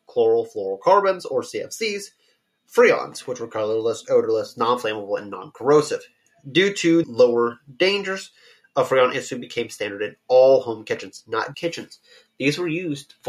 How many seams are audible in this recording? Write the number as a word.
two